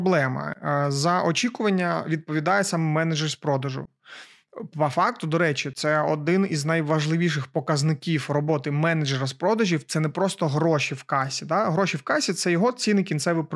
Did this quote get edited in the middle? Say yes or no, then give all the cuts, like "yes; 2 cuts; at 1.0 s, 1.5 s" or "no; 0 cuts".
no; 0 cuts